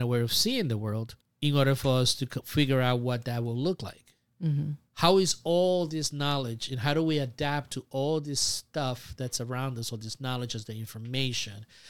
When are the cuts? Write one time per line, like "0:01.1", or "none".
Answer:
0:01.2